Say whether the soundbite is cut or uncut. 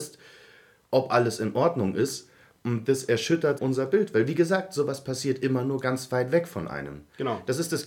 cut